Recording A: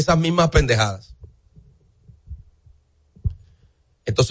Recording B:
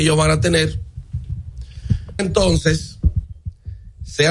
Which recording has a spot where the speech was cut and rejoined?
B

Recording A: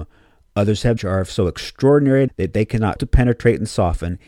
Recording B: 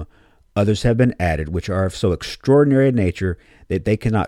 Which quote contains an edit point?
A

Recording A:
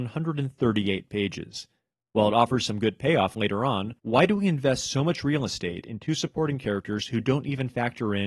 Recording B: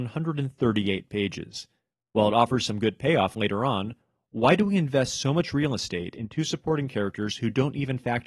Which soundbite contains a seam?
A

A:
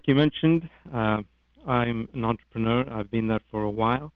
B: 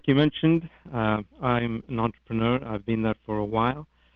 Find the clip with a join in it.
B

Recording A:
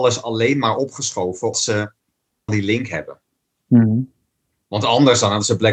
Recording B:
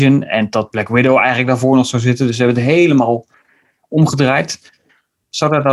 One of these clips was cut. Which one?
A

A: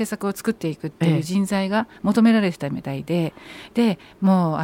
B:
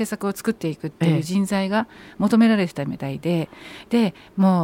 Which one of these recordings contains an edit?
A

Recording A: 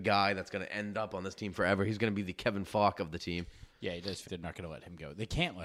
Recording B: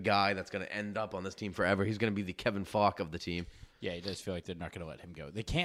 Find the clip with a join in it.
A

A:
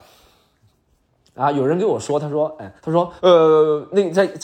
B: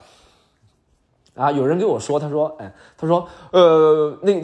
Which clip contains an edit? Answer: A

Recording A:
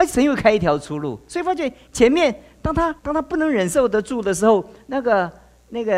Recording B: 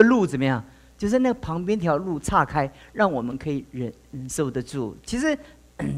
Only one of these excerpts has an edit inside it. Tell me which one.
A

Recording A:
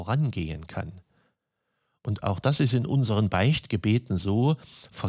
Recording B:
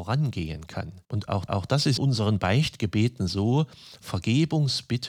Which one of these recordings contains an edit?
B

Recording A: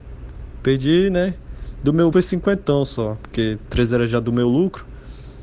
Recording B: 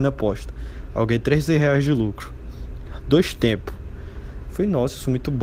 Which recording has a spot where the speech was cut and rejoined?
A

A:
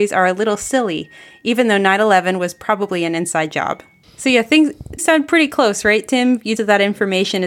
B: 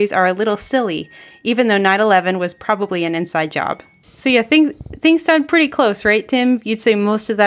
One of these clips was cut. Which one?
A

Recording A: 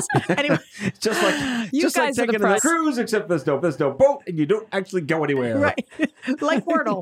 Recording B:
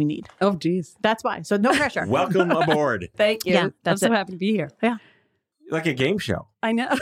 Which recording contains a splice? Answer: A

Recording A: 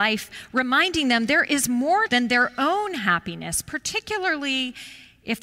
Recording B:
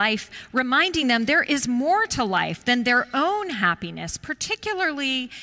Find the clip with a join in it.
A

